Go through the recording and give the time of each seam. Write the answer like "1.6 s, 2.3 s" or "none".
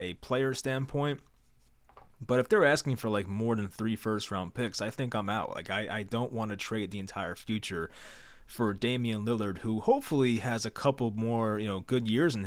none